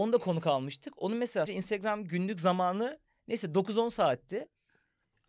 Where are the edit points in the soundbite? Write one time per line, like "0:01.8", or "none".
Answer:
0:01.5